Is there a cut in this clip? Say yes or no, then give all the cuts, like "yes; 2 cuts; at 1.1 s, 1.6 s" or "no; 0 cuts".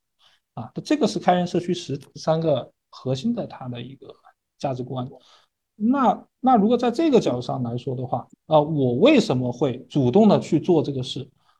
yes; 1 cut; at 8.4 s